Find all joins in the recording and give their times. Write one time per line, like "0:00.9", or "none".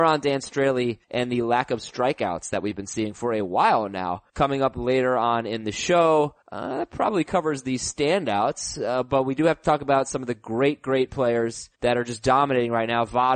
0:01.0
0:04.3
0:06.4
0:11.7